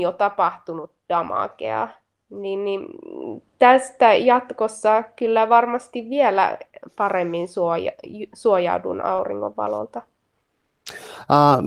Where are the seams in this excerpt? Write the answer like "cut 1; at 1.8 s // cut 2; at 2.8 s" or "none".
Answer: none